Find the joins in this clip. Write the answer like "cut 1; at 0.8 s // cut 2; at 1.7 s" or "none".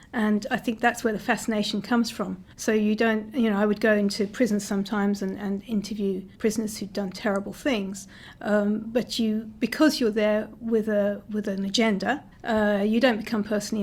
cut 1; at 2.5 s // cut 2; at 6.3 s // cut 3; at 12.3 s